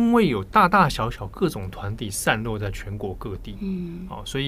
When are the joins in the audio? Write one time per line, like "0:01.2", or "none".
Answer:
none